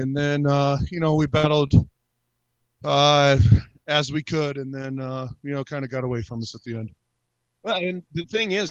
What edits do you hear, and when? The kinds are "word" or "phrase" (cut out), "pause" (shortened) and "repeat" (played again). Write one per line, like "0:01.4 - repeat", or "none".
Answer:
none